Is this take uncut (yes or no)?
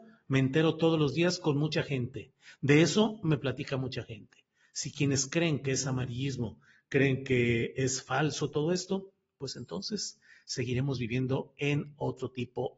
yes